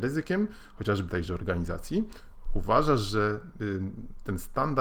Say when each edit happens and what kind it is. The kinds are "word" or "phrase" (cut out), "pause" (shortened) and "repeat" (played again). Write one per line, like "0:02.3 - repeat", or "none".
0:01.1 - phrase